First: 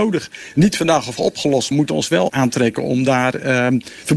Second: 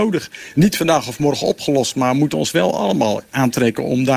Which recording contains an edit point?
first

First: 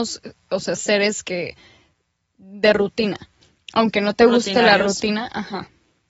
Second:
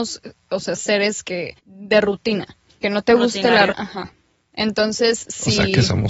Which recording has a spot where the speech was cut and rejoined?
second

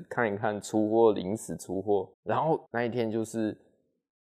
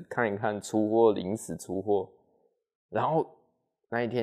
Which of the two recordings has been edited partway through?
first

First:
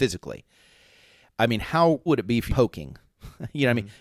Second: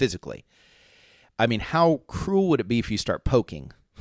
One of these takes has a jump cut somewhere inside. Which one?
first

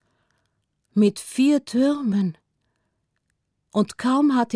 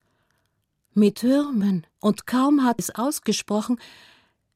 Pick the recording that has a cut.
second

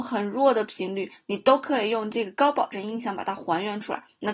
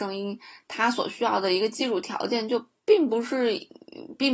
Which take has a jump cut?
second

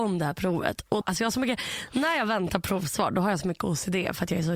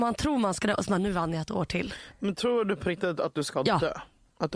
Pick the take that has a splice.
first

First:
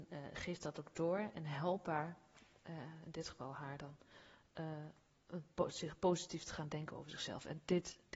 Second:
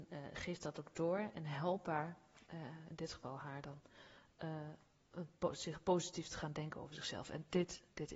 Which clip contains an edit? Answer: second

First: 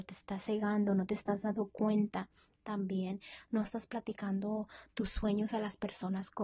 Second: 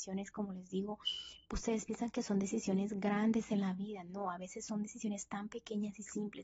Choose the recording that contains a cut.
second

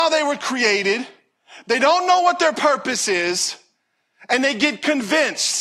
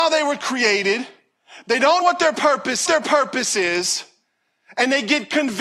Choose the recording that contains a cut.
second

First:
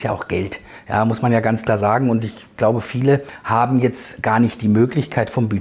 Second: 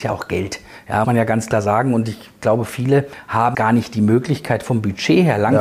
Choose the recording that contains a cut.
second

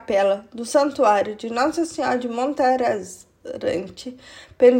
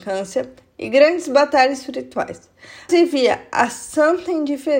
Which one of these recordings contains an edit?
second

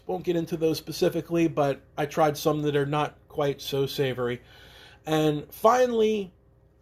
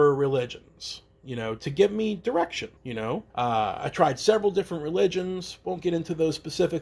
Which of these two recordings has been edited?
second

